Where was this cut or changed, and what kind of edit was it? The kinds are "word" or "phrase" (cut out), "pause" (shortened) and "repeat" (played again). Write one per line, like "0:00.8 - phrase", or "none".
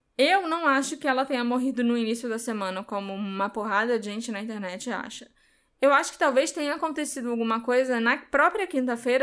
none